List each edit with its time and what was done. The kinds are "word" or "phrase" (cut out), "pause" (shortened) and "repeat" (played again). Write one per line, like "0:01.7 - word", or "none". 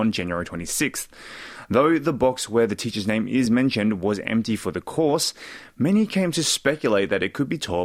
none